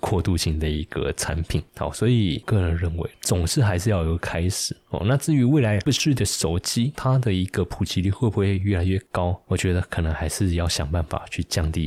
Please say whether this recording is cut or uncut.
cut